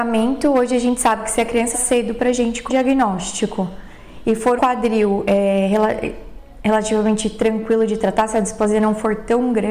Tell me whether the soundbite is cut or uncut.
cut